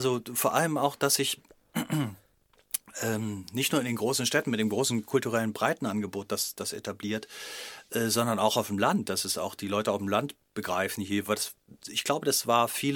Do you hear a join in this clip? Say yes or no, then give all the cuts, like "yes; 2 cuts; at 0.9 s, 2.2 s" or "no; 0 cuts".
no; 0 cuts